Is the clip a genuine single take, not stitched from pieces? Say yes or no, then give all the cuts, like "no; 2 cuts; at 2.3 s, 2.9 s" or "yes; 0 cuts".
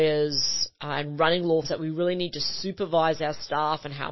no; 1 cut; at 1.6 s